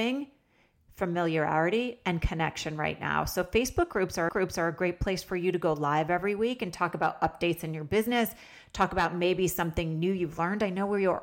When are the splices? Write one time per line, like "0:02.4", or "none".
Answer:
0:04.3